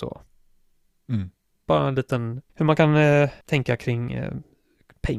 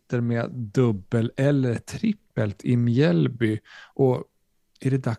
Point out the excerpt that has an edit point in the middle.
first; 2 cuts; at 2.5 s, 3.4 s

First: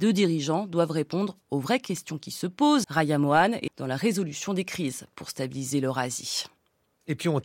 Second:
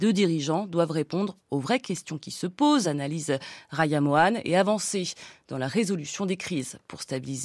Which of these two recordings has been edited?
first; 2 cuts; at 2.8 s, 3.7 s

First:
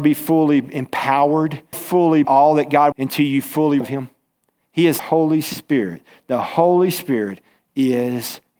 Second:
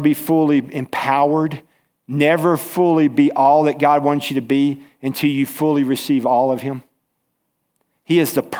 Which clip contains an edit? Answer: first; 6 cuts; at 1.7 s, 2.2 s, 2.9 s, 3.8 s, 4.4 s, 5.0 s

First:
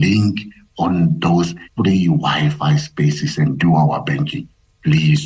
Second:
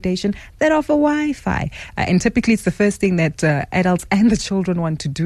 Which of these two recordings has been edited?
first; 1 cut; at 1.7 s

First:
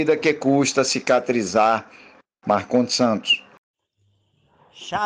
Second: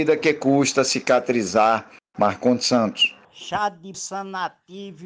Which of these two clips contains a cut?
second; 3 cuts; at 2.0 s, 3.2 s, 3.9 s

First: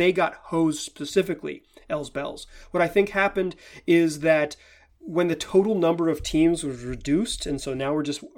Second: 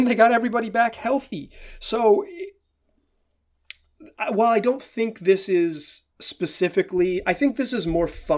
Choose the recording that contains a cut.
second; 1 cut; at 6.1 s

